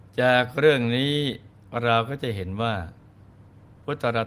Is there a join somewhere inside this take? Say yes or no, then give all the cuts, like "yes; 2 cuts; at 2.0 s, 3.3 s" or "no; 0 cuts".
no; 0 cuts